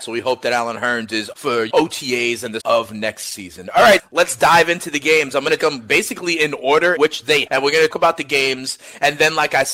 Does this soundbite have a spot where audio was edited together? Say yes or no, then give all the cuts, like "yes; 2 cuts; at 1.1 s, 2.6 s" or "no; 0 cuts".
yes; 8 cuts; at 1.3 s, 1.7 s, 2.6 s, 4.0 s, 5.6 s, 7.0 s, 7.5 s, 7.9 s